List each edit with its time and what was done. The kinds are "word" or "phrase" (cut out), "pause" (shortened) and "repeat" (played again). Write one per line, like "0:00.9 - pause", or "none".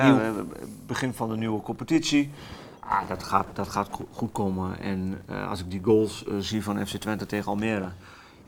none